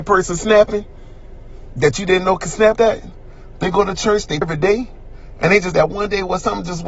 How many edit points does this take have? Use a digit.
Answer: 3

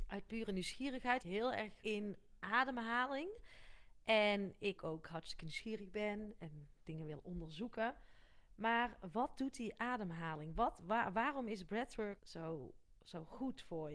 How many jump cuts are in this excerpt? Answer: 4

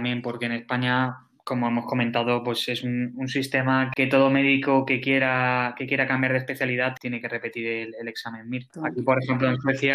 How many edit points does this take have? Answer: 0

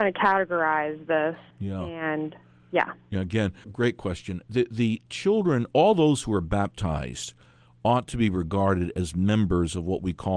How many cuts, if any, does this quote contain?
2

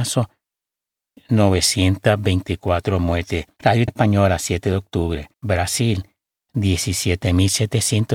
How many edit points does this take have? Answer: 2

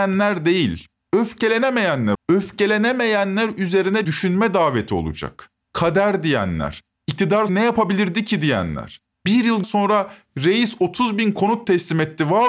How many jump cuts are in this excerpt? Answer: 4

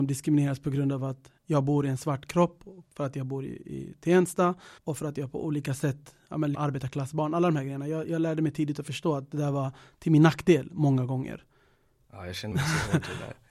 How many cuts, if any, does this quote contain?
4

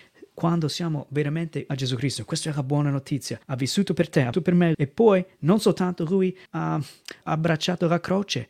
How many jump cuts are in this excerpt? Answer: 6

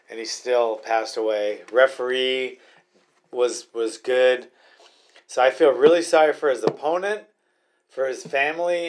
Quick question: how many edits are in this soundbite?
0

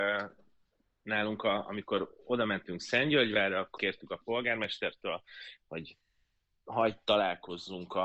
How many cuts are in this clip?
1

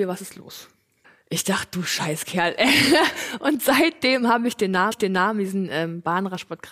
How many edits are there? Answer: 2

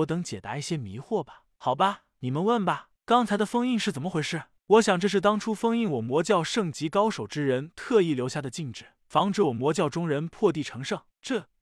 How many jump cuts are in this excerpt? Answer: 0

